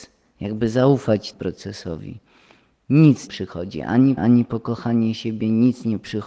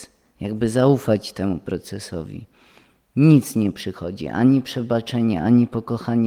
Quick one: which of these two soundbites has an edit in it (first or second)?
first